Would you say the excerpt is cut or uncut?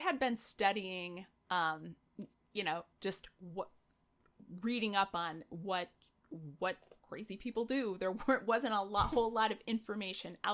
cut